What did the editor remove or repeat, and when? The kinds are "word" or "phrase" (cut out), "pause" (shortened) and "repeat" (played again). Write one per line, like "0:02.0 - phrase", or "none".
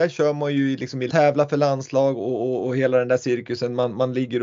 0:01.1 - phrase